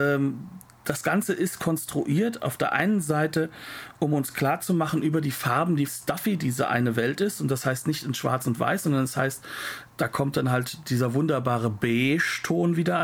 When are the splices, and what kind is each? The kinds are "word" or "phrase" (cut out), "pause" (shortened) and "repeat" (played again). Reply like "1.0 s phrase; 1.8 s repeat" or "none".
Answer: 5.9 s phrase; 9.9 s pause